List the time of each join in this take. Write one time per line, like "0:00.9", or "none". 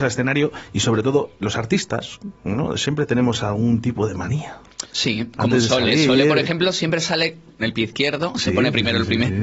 0:01.4
0:07.6